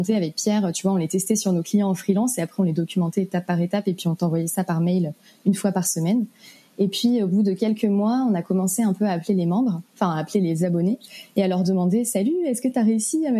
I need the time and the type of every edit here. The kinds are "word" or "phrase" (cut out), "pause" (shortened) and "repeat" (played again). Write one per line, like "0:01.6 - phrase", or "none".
none